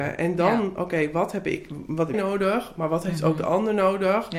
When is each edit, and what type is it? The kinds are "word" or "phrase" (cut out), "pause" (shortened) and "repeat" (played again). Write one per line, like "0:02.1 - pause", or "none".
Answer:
0:02.1 - word